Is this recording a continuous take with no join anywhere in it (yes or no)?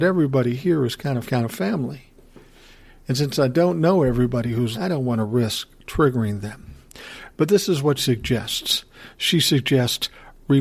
no